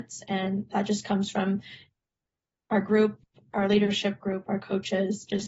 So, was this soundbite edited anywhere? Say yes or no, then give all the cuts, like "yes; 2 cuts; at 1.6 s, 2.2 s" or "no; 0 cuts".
no; 0 cuts